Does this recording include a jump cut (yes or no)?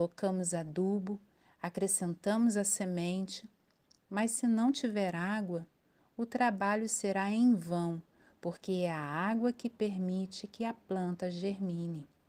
no